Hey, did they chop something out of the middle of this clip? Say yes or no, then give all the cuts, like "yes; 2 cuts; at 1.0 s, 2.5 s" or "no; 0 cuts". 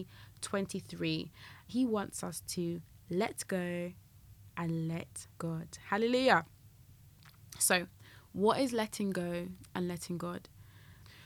yes; 2 cuts; at 1.7 s, 5.3 s